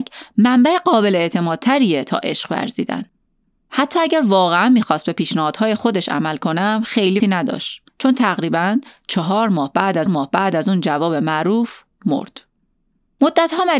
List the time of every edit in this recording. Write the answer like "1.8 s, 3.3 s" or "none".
7.2 s, 7.9 s, 10.1 s